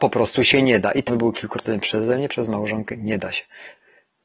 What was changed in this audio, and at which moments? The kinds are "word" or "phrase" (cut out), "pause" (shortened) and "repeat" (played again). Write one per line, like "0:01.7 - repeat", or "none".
0:01.1 - word
0:02.3 - word

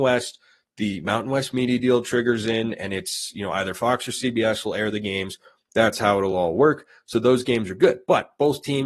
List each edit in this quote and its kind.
none

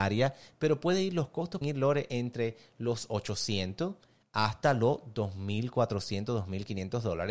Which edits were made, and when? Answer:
0:01.6 - word

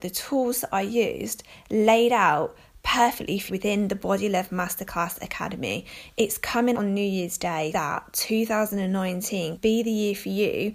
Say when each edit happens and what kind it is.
0:03.5 - word
0:06.7 - word
0:07.7 - word
0:09.6 - word

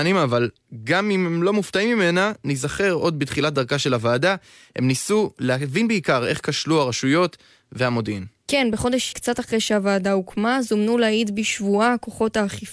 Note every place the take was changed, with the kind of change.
0:09.1 - word

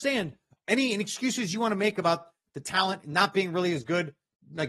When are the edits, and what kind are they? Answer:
none

